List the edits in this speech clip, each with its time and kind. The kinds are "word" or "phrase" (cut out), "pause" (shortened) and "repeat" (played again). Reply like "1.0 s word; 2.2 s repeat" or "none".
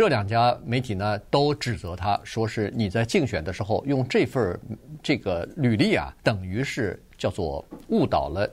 6.2 s pause